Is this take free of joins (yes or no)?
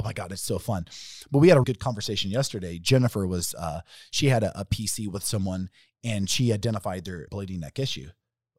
no